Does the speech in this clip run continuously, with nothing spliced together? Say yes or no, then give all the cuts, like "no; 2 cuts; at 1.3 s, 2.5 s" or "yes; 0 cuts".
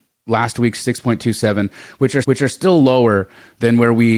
no; 1 cut; at 2.2 s